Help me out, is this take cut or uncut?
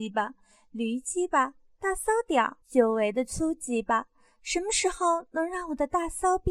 cut